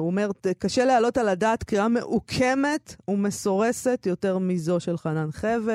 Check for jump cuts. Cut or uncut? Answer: uncut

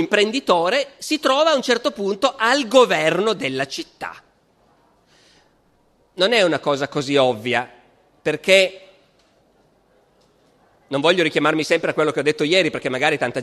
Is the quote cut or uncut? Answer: uncut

